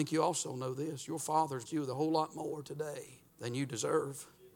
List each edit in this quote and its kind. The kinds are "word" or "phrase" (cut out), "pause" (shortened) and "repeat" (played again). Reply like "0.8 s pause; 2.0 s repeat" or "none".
1.7 s word; 3.3 s pause